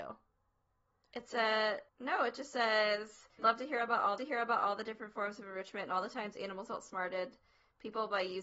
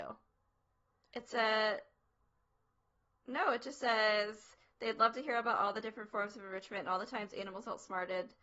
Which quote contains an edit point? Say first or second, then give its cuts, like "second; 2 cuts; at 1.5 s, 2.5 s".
first; 3 cuts; at 1.9 s, 3.4 s, 4.2 s